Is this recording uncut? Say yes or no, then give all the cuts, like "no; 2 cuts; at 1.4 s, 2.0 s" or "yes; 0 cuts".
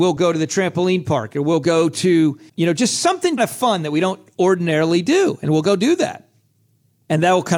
no; 2 cuts; at 2.5 s, 3.4 s